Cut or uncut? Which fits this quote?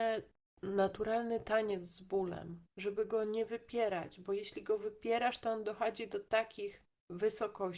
cut